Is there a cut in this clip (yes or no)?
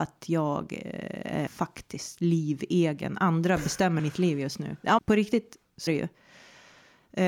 yes